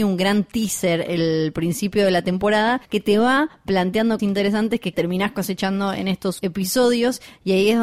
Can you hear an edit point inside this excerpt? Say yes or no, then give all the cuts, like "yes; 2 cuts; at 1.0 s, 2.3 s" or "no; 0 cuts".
yes; 4 cuts; at 2.8 s, 4.2 s, 4.9 s, 6.4 s